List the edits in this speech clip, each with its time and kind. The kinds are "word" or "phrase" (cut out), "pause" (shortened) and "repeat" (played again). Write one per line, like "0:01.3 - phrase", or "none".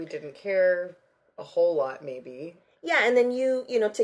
none